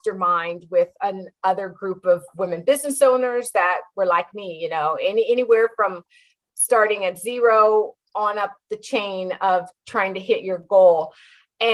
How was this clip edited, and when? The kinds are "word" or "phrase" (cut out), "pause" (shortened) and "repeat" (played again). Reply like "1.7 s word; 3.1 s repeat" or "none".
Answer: none